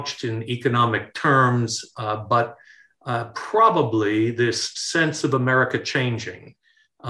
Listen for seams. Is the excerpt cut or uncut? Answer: uncut